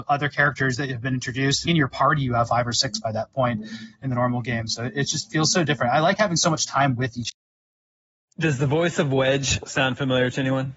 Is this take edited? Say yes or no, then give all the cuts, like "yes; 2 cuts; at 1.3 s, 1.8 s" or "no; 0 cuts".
yes; 1 cut; at 1.7 s